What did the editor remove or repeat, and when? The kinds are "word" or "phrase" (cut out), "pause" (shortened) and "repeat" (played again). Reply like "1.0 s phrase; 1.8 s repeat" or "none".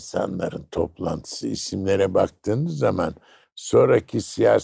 none